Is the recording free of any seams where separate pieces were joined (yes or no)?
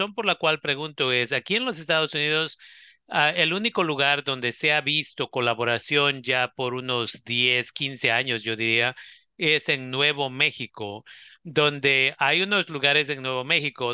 yes